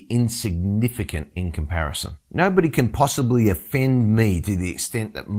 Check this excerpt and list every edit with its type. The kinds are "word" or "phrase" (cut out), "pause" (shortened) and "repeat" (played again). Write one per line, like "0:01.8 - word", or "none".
0:02.2 - pause